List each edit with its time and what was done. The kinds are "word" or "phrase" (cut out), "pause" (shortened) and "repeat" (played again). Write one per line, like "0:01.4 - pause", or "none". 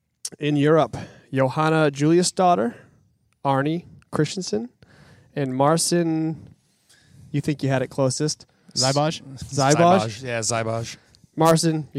none